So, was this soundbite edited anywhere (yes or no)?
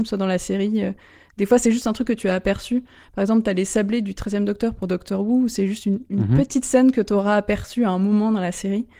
no